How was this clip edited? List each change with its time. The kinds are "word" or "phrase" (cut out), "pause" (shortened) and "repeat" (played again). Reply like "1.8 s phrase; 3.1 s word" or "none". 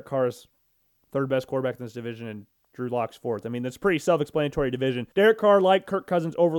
5.1 s pause